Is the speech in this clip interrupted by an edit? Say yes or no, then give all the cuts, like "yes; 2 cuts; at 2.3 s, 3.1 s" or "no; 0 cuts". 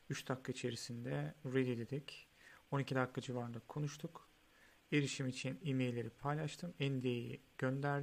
no; 0 cuts